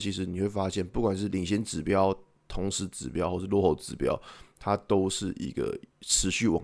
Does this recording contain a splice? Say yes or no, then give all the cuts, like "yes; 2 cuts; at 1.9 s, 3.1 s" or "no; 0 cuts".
no; 0 cuts